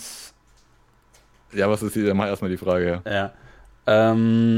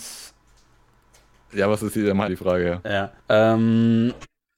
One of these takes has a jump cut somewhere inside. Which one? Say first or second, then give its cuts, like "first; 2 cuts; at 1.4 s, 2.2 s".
second; 2 cuts; at 2.3 s, 3.2 s